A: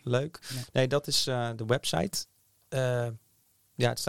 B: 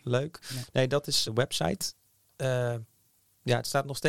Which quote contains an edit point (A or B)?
B